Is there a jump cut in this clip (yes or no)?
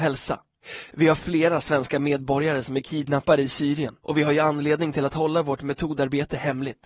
yes